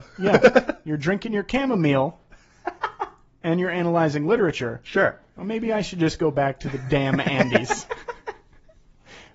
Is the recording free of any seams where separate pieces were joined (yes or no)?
yes